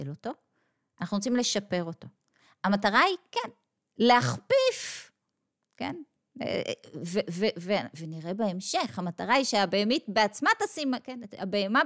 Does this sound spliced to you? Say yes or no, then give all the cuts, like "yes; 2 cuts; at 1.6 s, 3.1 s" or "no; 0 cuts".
no; 0 cuts